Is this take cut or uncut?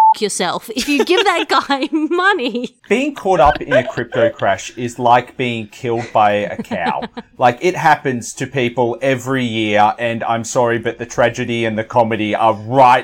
cut